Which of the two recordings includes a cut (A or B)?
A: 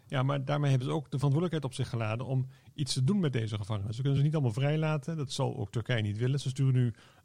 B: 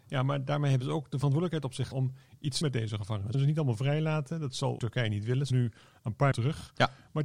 B